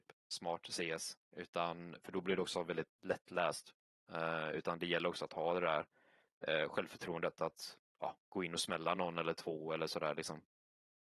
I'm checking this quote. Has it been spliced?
no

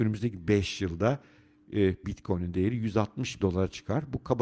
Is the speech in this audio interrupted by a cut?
yes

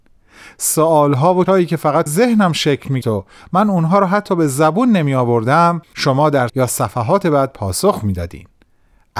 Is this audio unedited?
no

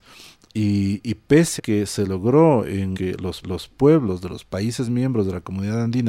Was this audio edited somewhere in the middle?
yes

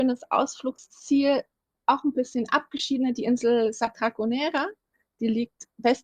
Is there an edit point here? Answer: no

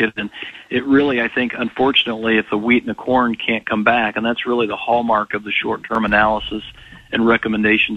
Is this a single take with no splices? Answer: yes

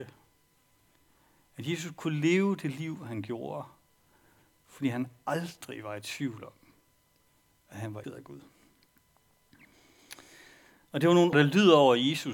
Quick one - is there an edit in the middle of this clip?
yes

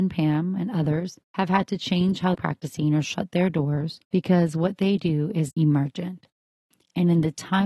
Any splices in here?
yes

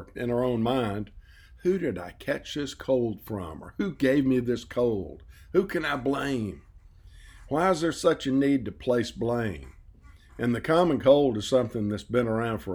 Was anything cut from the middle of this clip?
no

